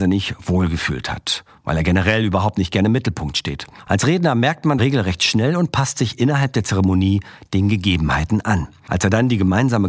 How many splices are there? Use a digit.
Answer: 1